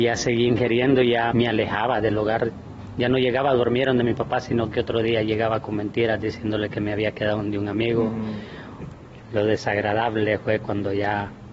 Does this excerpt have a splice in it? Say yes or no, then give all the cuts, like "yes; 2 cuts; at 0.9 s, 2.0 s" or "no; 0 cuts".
yes; 1 cut; at 1.3 s